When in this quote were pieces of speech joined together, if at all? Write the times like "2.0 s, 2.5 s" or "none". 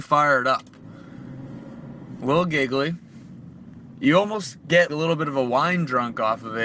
4.9 s